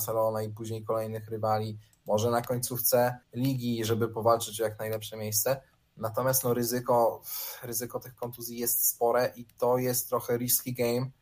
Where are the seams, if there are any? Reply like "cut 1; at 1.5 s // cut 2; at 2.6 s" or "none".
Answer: cut 1; at 3.2 s